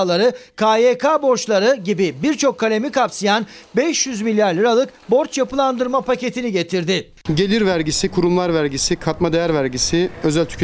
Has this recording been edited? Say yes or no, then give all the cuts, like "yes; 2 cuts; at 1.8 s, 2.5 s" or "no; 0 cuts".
no; 0 cuts